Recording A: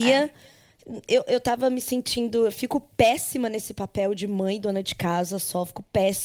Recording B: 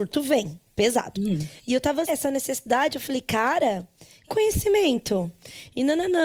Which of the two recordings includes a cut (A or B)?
B